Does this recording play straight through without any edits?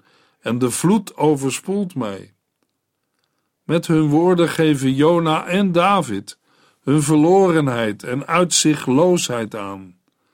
yes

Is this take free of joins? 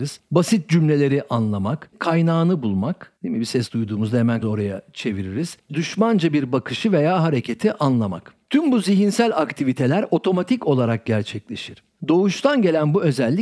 no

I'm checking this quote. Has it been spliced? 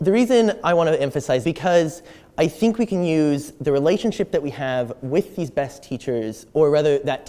yes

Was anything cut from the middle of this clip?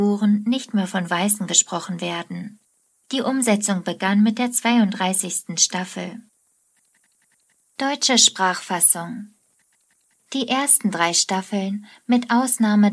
yes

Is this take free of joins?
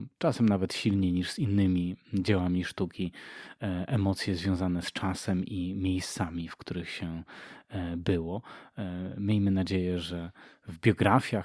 yes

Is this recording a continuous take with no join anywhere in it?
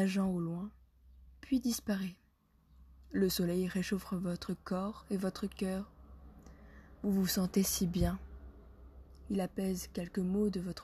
yes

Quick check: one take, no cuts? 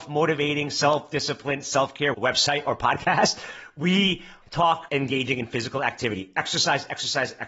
no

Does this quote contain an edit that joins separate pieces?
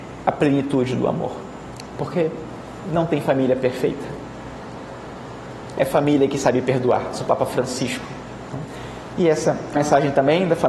yes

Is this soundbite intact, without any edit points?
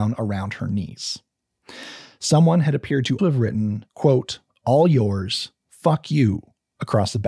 no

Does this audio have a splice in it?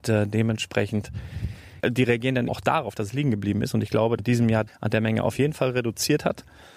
yes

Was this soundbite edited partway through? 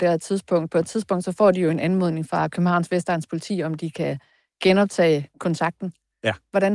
no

